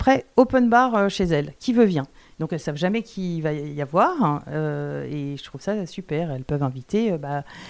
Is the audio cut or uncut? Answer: cut